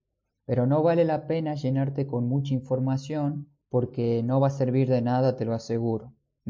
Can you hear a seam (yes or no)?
yes